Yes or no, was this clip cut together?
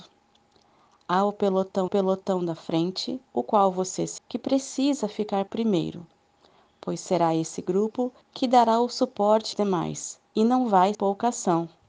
yes